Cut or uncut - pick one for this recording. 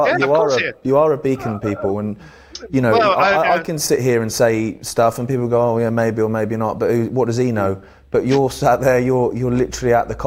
cut